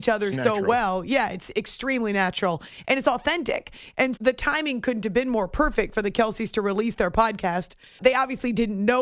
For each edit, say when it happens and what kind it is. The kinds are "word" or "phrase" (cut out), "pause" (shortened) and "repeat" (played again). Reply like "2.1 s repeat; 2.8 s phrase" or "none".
4.2 s word; 8.0 s word